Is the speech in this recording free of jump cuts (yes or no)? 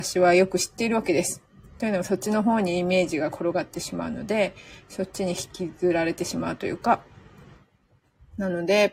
yes